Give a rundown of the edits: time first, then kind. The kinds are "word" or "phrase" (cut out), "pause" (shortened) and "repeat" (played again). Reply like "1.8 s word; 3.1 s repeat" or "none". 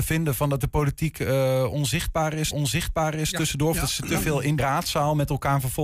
2.5 s repeat; 4.6 s word